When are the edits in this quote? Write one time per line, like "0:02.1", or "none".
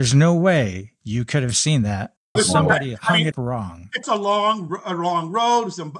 0:02.4
0:03.3
0:04.0